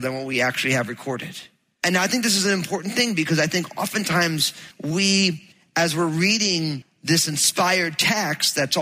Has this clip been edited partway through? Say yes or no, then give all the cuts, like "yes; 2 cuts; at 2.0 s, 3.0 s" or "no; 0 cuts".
no; 0 cuts